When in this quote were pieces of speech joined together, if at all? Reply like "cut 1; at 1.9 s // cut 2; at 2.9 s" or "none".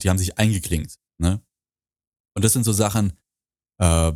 cut 1; at 1.1 s